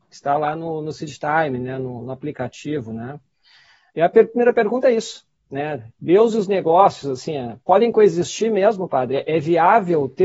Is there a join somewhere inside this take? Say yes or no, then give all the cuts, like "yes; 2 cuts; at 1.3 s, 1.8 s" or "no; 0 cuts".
no; 0 cuts